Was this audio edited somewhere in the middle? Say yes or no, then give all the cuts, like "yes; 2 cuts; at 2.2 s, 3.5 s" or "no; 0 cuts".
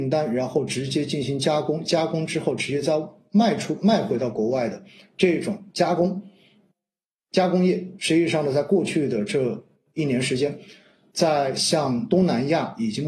no; 0 cuts